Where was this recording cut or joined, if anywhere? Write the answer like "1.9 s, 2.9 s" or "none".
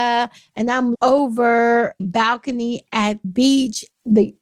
0.9 s, 2.0 s, 3.2 s